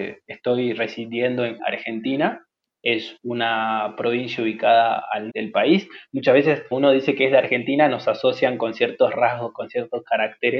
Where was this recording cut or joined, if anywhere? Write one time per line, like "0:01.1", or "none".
0:01.6
0:05.3
0:06.7